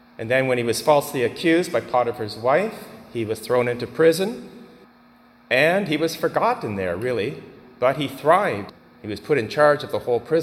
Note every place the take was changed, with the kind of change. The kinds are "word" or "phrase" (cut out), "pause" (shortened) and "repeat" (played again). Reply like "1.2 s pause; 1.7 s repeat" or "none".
none